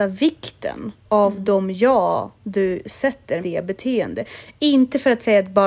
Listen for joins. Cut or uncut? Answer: cut